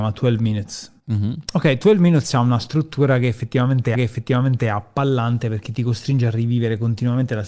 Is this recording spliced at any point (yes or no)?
yes